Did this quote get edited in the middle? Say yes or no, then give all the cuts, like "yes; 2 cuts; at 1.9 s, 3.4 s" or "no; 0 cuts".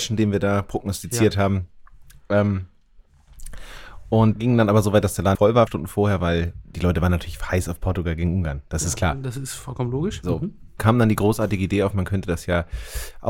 yes; 4 cuts; at 4.3 s, 5.3 s, 5.7 s, 10.8 s